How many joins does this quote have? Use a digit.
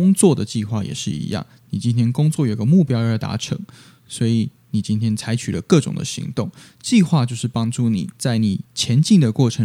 1